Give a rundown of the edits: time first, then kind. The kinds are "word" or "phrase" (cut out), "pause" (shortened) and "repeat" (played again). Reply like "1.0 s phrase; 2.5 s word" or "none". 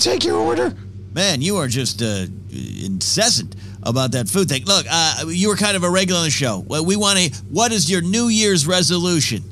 none